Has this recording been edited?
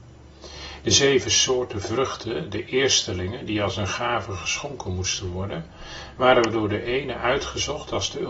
no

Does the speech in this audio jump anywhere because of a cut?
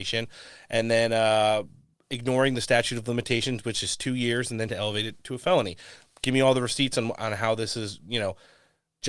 yes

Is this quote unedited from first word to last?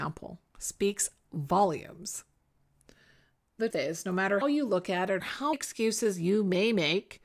no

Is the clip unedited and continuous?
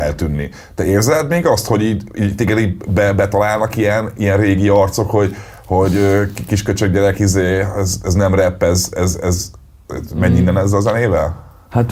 yes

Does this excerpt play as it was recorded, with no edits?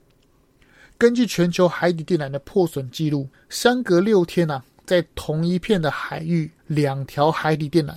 no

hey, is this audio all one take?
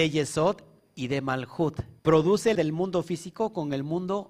no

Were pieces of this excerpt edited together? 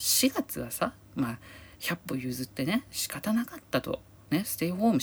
yes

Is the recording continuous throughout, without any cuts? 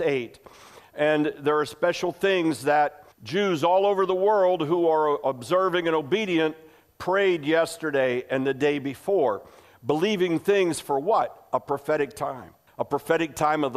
no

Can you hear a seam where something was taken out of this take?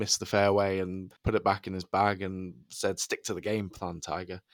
yes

